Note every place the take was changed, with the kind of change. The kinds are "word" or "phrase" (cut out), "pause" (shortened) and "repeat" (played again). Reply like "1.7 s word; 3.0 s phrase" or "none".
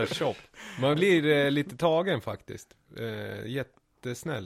0.9 s word